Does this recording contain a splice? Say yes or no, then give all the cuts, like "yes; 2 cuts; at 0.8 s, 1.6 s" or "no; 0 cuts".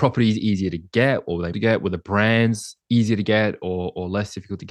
yes; 1 cut; at 1.5 s